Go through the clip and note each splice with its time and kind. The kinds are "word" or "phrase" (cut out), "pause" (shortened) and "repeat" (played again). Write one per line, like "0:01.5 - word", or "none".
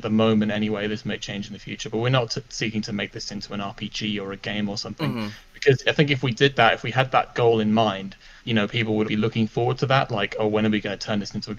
0:08.4 - word
0:09.0 - word